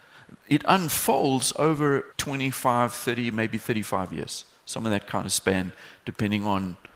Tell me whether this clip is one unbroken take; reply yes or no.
no